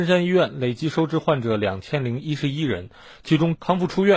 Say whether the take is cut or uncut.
uncut